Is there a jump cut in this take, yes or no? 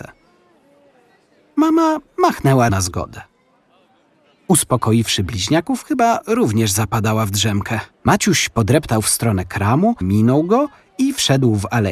yes